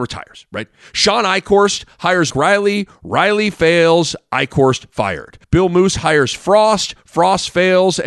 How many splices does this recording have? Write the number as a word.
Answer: two